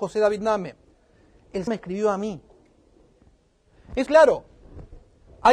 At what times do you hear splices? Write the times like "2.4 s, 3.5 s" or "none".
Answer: 1.7 s, 4.1 s